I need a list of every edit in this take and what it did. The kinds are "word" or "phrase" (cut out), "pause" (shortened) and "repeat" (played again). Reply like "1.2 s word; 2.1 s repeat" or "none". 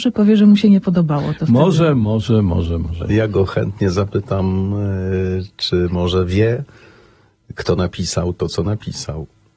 none